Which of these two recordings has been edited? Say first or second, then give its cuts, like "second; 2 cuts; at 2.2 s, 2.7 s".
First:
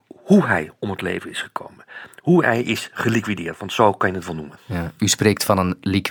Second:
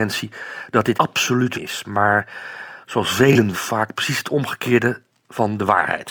second; 3 cuts; at 0.9 s, 1.5 s, 3.5 s